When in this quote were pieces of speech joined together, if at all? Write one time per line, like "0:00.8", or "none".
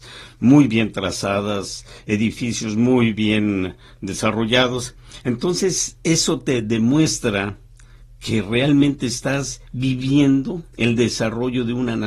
0:10.7